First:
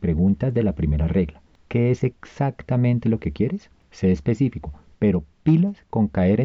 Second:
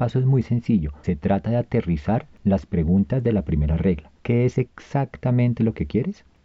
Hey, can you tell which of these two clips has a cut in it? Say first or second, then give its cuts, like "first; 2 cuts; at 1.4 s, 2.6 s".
second; 2 cuts; at 1.0 s, 4.2 s